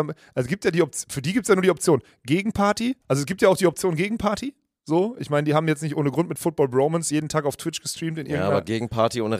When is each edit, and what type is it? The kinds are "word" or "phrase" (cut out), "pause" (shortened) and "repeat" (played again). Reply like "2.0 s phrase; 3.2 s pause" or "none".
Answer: 3.0 s pause

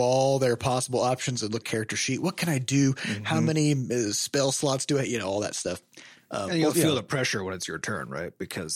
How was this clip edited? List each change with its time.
1.6 s phrase; 6.7 s word

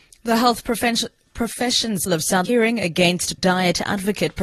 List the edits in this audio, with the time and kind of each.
2.1 s word; 2.4 s word; 3.4 s word

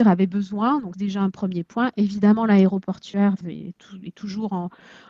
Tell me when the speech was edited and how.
0.9 s phrase; 3.4 s word

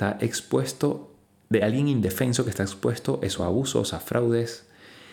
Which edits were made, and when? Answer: none

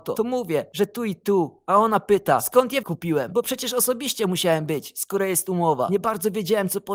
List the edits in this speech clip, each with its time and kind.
2.8 s word

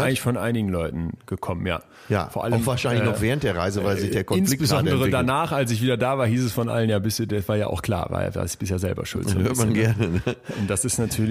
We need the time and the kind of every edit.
none

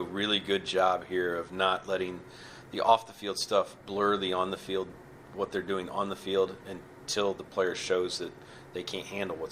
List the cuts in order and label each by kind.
none

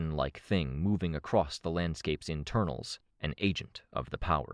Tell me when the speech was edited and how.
3.1 s pause

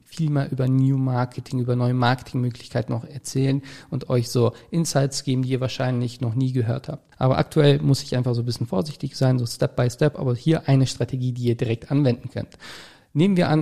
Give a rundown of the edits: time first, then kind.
7.1 s pause

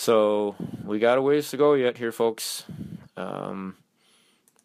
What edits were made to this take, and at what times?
none

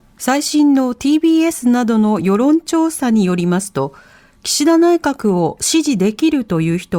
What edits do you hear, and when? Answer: none

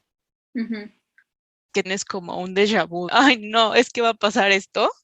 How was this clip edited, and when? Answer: 1.8 s word; 3.1 s word

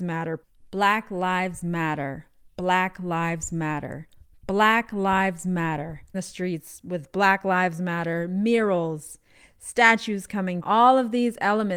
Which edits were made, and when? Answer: 6.1 s word; 10.6 s word

